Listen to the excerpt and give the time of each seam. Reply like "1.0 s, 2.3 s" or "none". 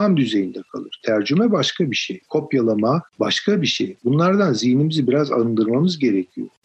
3.1 s

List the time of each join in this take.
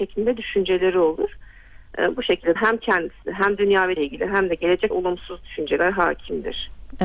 2.6 s, 4.0 s, 4.9 s

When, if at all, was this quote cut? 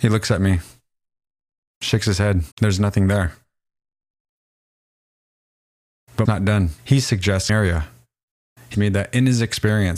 2.5 s, 6.2 s, 6.8 s, 7.5 s, 8.7 s

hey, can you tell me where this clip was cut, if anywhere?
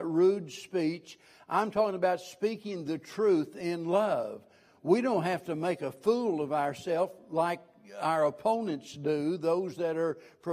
none

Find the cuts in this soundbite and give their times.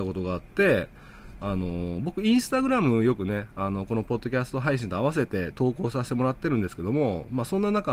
none

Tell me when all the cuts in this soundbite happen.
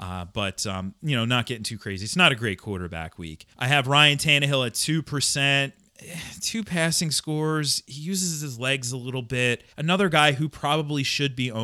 3.5 s, 9.7 s

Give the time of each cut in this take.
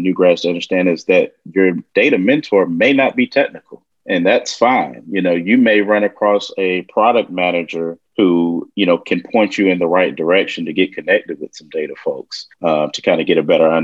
3.9 s, 8.1 s, 12.5 s

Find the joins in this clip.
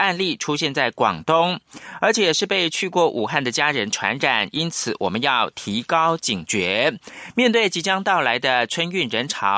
none

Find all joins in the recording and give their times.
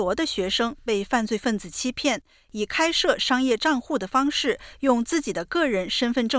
none

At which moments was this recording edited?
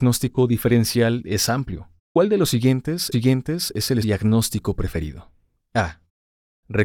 2.0 s, 3.1 s, 4.0 s, 5.6 s

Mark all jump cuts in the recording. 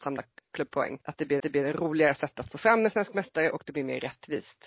1.0 s, 1.4 s

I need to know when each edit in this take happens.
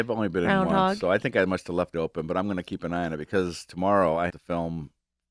1.9 s, 4.3 s

